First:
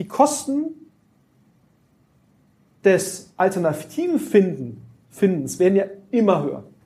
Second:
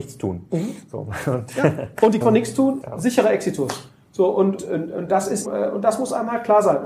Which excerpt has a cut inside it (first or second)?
second